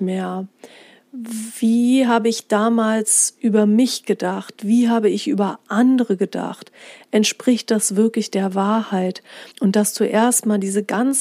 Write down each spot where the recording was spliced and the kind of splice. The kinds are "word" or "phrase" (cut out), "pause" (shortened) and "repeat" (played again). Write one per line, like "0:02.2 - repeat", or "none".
0:09.5 - pause